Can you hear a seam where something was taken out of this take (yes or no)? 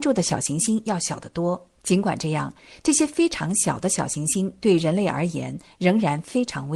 yes